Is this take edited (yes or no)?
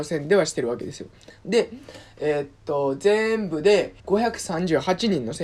yes